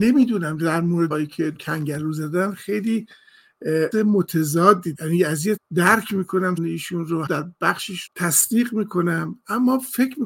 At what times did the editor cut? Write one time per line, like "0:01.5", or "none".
0:01.1
0:01.6
0:03.9
0:04.9
0:05.6
0:06.6
0:07.3
0:08.1